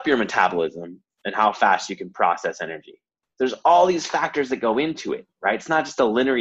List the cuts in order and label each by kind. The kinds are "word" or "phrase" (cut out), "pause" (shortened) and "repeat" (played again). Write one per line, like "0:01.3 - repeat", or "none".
none